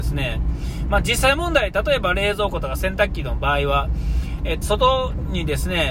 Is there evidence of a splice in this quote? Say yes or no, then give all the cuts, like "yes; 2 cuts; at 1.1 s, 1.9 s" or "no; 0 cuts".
yes; 1 cut; at 4.6 s